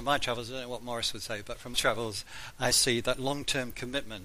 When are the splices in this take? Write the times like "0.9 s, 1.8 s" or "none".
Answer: 1.7 s, 2.7 s